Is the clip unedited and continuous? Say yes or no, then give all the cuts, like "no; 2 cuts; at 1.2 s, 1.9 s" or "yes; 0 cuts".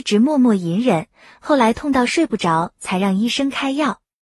yes; 0 cuts